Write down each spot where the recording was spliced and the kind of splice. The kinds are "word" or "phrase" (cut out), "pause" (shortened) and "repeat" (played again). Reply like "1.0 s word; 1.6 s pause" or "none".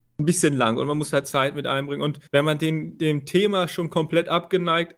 2.3 s pause